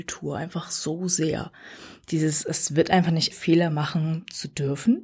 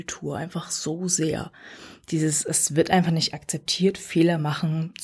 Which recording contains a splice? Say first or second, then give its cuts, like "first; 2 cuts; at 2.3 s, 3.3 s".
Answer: first; 1 cut; at 3.3 s